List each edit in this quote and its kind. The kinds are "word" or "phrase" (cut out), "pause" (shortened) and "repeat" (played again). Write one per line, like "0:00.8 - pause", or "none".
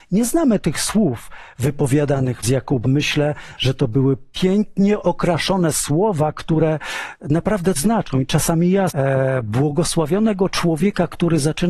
0:02.4 - word
0:02.8 - word
0:07.8 - word
0:08.9 - word